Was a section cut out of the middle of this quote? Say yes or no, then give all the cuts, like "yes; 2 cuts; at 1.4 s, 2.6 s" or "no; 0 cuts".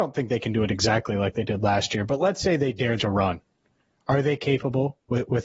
yes; 1 cut; at 3.0 s